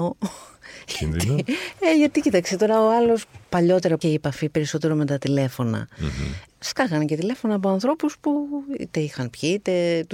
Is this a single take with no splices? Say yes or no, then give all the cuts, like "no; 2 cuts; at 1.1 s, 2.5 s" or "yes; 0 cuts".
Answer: no; 1 cut; at 4.0 s